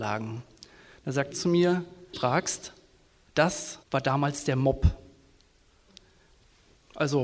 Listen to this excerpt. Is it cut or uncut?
cut